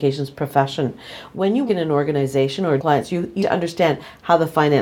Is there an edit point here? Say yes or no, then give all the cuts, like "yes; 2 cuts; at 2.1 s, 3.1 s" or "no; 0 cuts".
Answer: yes; 3 cuts; at 1.7 s, 2.8 s, 3.4 s